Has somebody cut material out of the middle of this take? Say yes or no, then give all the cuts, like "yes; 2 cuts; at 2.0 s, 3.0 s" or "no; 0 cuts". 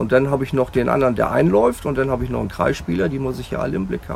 no; 0 cuts